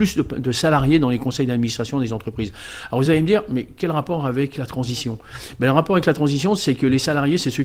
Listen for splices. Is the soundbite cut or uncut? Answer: uncut